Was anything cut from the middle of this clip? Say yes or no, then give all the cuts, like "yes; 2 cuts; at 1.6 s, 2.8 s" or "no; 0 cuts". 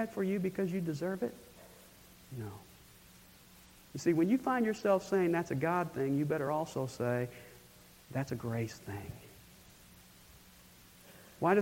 no; 0 cuts